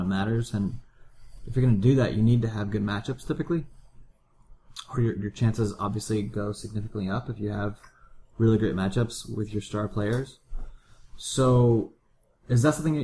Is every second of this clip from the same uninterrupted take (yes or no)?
yes